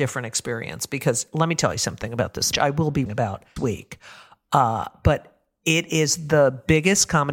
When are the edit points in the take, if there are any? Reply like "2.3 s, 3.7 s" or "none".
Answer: 2.5 s, 3.1 s, 3.6 s

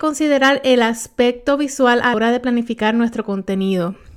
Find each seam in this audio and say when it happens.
2.1 s

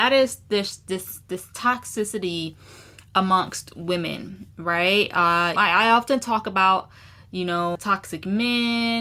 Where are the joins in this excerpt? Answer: 5.6 s, 7.8 s

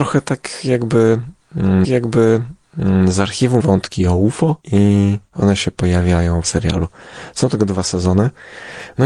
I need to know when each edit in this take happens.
1.8 s, 3.6 s, 6.4 s

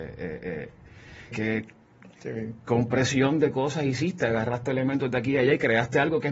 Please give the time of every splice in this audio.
1.3 s

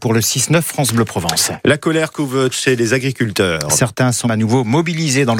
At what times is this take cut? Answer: 2.5 s, 4.2 s

